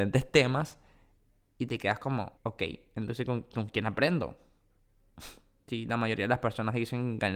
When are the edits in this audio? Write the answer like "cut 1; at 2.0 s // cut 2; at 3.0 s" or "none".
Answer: cut 1; at 2.4 s